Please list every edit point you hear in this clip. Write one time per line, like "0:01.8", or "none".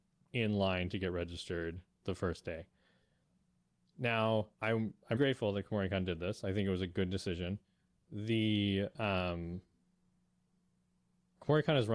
0:04.5
0:05.2